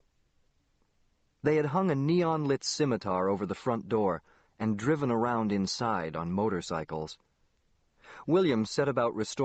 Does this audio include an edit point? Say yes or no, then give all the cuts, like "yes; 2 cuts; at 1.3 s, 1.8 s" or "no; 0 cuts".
no; 0 cuts